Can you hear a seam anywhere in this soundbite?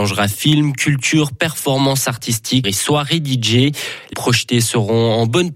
yes; 2 cuts; at 2.6 s, 4.1 s

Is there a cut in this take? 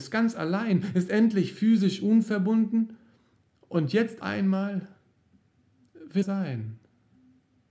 yes; 2 cuts; at 4.2 s, 6.2 s

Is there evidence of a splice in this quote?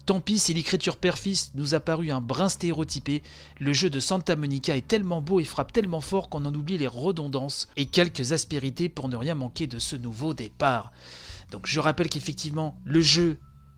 no; 0 cuts

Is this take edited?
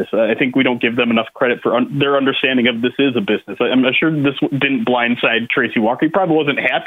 no; 0 cuts

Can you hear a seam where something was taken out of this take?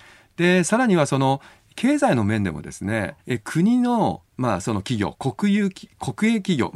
yes; 1 cut; at 3.2 s

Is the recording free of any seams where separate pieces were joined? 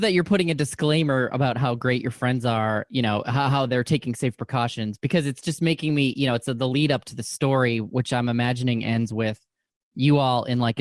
yes; 0 cuts

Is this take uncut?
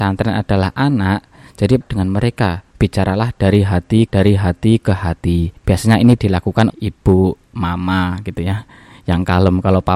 no; 6 cuts; at 1.8 s, 2.7 s, 4.1 s, 5.6 s, 6.2 s, 6.7 s

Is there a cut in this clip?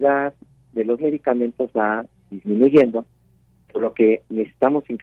no; 0 cuts

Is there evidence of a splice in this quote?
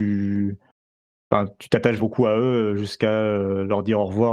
yes; 1 cut; at 2.0 s

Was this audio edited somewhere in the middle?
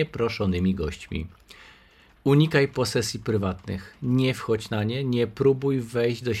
no; 0 cuts

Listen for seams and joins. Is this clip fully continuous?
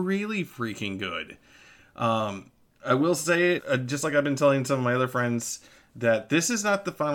no; 1 cut; at 3.6 s

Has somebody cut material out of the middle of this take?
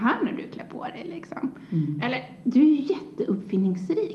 no; 0 cuts

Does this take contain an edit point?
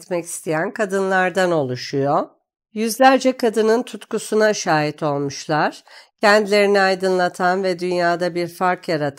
no; 0 cuts

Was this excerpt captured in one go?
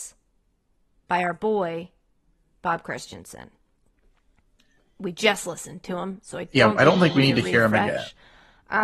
yes; 0 cuts

